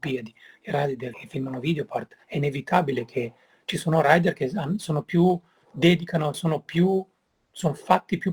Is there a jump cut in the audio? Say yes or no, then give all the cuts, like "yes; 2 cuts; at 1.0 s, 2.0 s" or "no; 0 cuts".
yes; 3 cuts; at 1.1 s, 2.2 s, 6.3 s